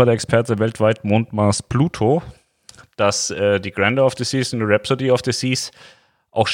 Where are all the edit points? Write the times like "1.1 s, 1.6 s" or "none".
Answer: none